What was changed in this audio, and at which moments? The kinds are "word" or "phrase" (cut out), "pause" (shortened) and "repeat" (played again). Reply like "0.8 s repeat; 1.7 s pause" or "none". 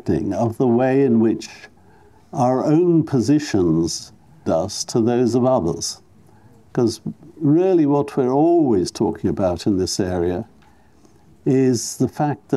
4.5 s word